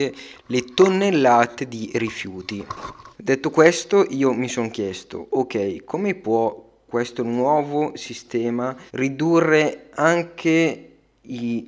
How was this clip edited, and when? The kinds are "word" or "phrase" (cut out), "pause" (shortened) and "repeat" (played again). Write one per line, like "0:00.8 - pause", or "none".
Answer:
0:03.1 - pause
0:08.9 - pause